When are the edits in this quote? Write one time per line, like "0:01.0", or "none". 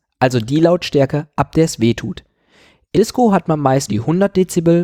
0:02.9
0:03.9